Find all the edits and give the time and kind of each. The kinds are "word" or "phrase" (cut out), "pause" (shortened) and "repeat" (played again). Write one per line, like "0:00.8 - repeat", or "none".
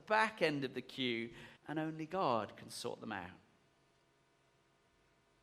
0:01.6 - pause